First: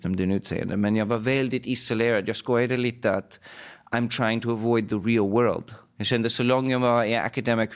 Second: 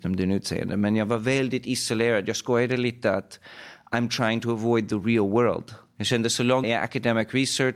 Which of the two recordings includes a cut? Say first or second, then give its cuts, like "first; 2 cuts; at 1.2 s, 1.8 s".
second; 1 cut; at 6.6 s